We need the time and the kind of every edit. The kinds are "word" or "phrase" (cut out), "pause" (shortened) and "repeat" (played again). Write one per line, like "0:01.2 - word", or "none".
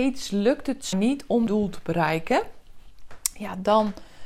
0:00.9 - word
0:01.5 - word